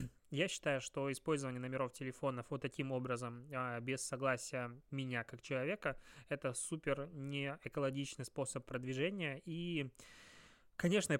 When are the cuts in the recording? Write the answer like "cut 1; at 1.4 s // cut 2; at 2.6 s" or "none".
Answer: none